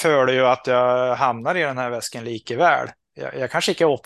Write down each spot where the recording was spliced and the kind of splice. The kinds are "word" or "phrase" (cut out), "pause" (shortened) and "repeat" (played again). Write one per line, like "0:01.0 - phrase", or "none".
none